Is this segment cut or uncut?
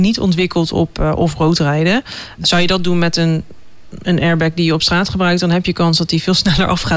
uncut